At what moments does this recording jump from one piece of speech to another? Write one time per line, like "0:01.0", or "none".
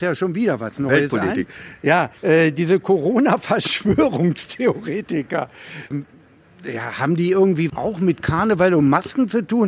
0:02.2
0:05.9
0:07.7